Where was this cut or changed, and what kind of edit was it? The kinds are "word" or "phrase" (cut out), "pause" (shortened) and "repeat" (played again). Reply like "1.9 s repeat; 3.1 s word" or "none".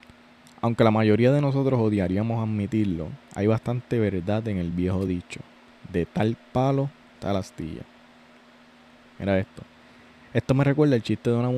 none